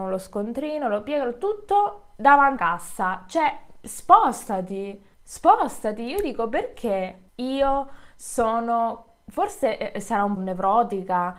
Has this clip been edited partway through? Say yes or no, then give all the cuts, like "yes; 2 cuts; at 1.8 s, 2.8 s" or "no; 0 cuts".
yes; 4 cuts; at 2.6 s, 5.1 s, 7.3 s, 10.4 s